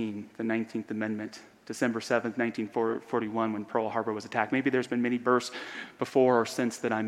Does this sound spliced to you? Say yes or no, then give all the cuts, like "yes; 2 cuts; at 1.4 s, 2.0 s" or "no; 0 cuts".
no; 0 cuts